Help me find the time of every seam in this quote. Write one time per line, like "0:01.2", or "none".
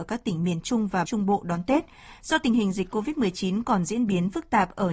0:01.0